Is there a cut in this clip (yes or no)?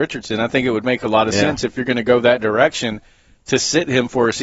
no